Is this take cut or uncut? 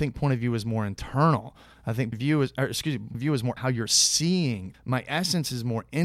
cut